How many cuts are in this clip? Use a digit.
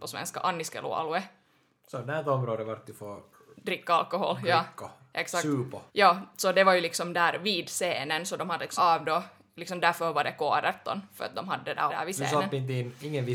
3